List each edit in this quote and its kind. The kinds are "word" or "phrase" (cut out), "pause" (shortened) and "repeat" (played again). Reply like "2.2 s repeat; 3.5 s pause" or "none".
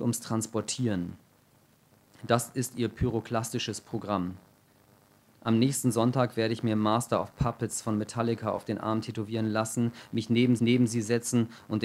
10.6 s repeat